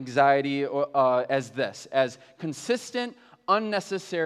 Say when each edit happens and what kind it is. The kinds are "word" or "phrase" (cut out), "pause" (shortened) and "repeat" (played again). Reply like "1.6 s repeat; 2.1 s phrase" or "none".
none